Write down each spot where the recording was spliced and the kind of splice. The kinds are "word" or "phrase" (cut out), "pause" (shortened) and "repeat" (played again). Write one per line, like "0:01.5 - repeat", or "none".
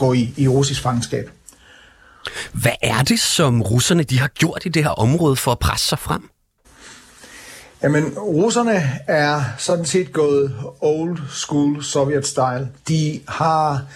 0:12.8 - pause